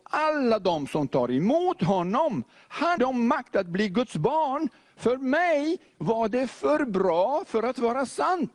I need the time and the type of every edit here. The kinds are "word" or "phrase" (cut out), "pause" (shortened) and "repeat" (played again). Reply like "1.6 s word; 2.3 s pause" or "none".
3.0 s word